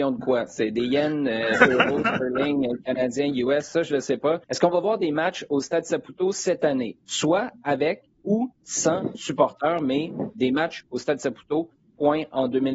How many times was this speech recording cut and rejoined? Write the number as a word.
two